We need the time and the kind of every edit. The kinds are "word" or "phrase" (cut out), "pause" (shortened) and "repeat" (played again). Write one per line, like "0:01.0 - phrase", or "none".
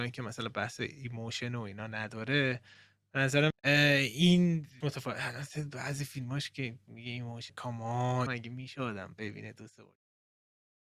0:03.5 - word
0:04.8 - word
0:07.5 - word
0:08.3 - word